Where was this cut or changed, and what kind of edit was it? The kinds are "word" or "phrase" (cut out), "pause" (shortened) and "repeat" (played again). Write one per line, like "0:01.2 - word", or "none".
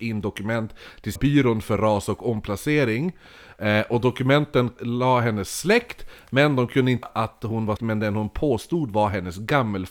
0:01.2 - word
0:04.8 - word
0:07.0 - word
0:07.8 - word